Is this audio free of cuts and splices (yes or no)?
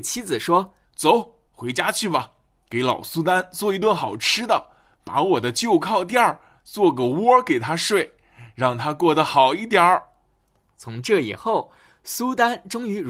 no